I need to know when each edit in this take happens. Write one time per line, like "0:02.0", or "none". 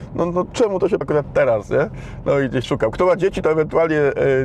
0:01.0
0:02.6